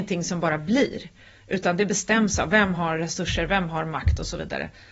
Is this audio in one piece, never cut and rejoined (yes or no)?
yes